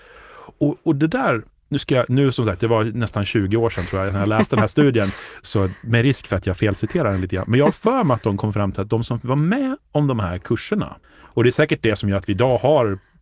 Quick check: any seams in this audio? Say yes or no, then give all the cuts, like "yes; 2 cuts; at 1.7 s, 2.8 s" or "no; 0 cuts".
yes; 2 cuts; at 1.5 s, 11.0 s